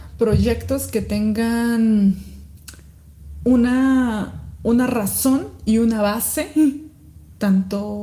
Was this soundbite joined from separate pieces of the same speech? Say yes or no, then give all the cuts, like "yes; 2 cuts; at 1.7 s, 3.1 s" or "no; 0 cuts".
no; 0 cuts